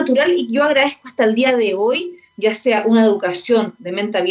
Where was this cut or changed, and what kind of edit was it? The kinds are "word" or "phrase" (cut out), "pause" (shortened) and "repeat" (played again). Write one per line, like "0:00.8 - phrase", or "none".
none

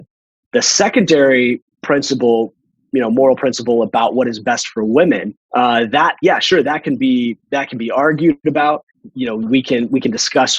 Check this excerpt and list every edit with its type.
0:01.7 - pause
0:05.4 - pause

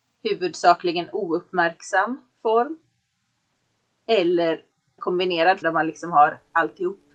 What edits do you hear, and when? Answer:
0:02.3 - pause
0:05.0 - word
0:05.6 - word

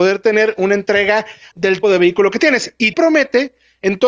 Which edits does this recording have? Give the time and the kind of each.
0:01.5 - word
0:01.8 - word
0:02.9 - word

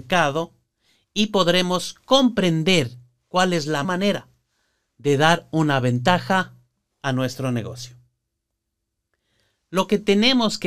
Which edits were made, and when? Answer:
0:03.8 - word

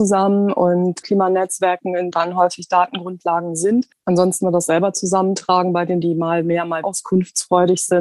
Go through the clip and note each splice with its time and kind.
0:01.0 - word
0:02.1 - word
0:04.4 - word
0:06.0 - word
0:06.8 - word

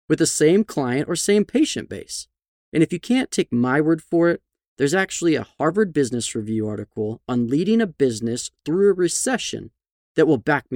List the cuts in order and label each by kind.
none

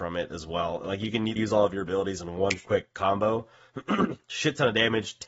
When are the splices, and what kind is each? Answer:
0:01.4 - word

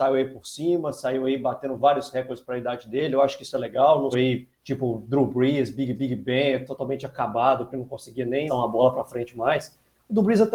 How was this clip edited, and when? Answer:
0:04.1 - word
0:04.5 - pause
0:05.9 - repeat
0:07.7 - phrase
0:08.5 - word

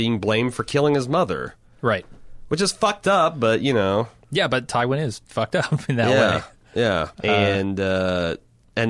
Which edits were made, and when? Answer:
0:04.2 - pause
0:07.1 - pause

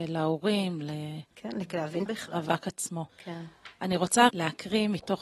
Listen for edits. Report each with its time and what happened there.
0:01.3 - pause
0:02.1 - word
0:03.1 - pause
0:04.3 - word

